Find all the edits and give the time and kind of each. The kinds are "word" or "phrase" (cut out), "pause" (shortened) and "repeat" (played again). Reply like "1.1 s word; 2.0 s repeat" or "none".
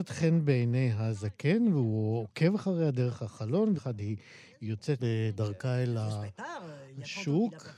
3.7 s word; 5.0 s word